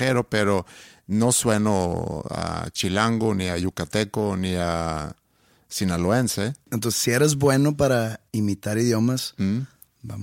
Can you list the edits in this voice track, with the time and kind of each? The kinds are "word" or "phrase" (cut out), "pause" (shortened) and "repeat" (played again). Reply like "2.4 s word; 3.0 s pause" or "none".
8.3 s pause